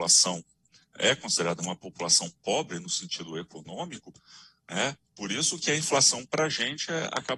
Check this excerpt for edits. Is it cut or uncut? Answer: uncut